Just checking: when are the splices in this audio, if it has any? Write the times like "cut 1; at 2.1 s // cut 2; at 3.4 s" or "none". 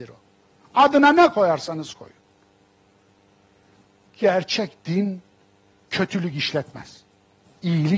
none